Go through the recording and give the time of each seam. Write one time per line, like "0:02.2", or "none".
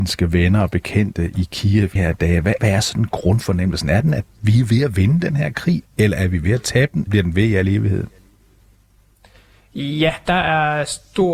0:02.0
0:02.6
0:07.1